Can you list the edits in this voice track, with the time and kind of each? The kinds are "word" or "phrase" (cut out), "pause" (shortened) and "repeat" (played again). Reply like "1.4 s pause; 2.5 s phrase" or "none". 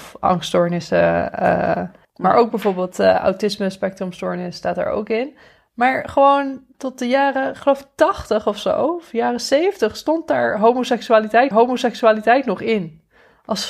2.0 s pause; 11.5 s repeat